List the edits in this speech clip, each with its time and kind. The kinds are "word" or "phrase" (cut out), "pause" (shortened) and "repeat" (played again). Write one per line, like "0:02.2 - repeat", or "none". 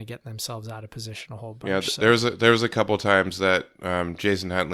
none